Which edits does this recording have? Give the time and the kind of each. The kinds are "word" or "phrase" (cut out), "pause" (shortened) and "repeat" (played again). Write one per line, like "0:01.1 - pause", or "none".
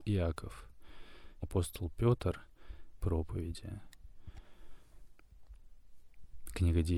0:01.4 - phrase
0:03.0 - phrase